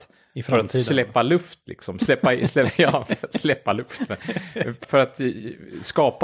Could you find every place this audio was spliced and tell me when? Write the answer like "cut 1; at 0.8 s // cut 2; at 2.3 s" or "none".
cut 1; at 4.8 s